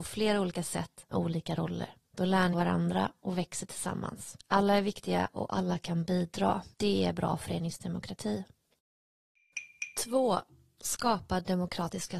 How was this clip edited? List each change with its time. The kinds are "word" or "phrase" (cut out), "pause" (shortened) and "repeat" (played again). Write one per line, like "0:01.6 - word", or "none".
0:01.1 - word
0:02.0 - pause
0:02.5 - phrase
0:06.7 - pause